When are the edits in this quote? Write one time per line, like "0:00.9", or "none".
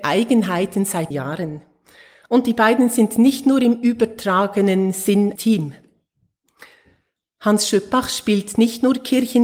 0:01.1
0:05.4